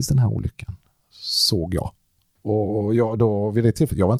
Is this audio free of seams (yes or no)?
yes